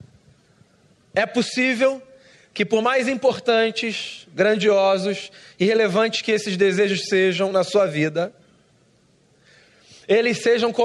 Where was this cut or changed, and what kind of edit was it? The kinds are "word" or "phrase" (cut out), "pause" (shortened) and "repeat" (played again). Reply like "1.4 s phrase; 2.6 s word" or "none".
none

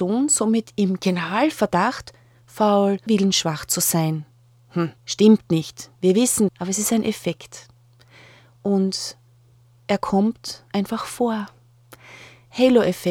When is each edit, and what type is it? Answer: 2.4 s word; 3.1 s word; 5.0 s pause; 6.0 s pause; 6.5 s word; 10.7 s pause

